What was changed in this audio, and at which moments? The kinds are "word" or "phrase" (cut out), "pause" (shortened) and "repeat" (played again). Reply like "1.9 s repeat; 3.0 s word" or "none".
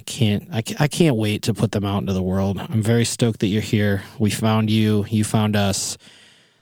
none